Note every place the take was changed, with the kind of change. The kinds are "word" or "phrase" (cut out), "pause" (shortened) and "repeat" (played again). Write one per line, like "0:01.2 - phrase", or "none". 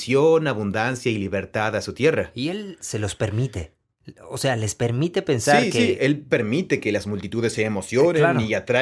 none